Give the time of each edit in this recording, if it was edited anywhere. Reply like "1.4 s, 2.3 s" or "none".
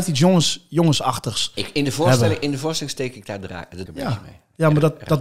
3.9 s

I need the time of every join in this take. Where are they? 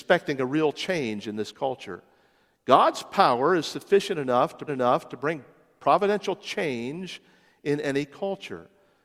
4.7 s

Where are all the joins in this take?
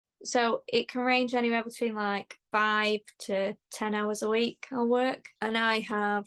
2.5 s, 5.4 s

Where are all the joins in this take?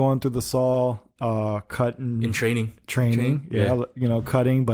none

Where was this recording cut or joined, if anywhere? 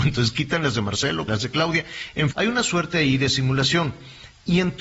1.3 s, 2.3 s

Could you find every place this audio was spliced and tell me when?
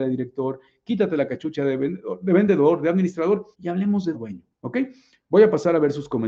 3.5 s, 4.1 s, 4.5 s

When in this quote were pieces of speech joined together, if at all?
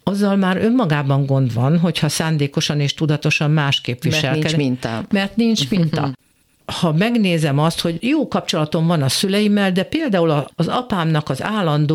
none

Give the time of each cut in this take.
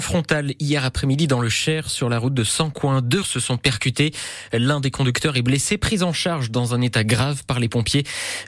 3.2 s

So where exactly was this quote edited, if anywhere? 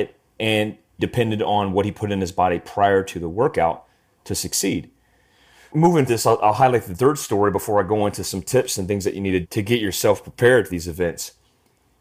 1.0 s, 6.1 s, 9.4 s, 10.7 s

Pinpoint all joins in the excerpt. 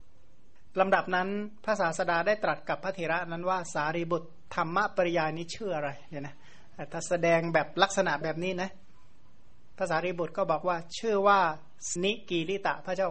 12.0 s

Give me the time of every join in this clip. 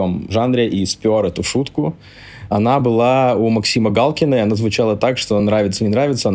none

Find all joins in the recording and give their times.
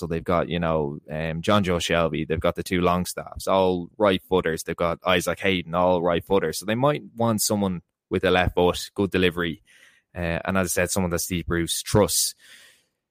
none

